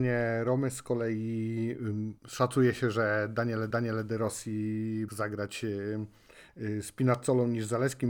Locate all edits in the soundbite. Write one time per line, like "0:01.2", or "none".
0:02.2
0:03.7
0:05.1